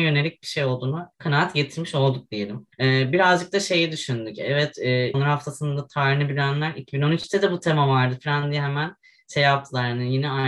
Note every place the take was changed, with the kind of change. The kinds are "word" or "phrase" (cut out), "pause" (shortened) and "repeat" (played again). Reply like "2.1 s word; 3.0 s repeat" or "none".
1.1 s pause; 2.7 s pause; 5.1 s phrase